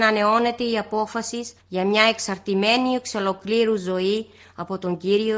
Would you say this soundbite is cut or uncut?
cut